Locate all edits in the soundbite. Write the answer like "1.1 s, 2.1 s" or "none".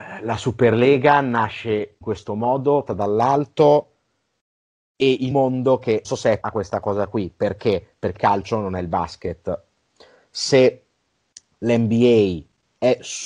2.0 s, 2.9 s, 5.3 s, 6.0 s, 6.4 s, 8.2 s